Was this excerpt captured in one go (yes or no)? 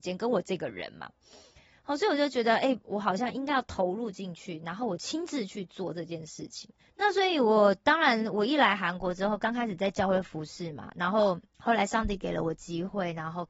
no